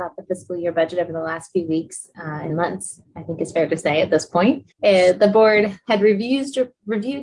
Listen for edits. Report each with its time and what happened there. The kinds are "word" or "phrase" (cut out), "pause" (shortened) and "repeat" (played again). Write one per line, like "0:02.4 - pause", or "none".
0:02.5 - word
0:04.7 - pause